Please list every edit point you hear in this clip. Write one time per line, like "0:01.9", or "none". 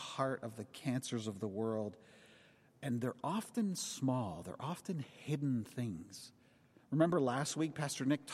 none